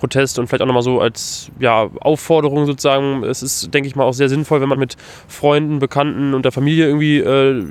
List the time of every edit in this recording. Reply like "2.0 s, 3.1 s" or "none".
4.8 s